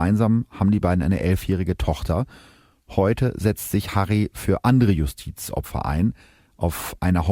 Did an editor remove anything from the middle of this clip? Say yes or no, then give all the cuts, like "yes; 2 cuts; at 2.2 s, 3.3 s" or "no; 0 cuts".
no; 0 cuts